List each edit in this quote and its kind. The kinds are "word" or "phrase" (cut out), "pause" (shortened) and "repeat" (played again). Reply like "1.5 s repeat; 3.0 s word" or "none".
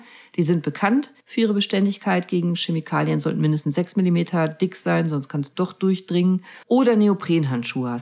1.2 s pause; 6.6 s pause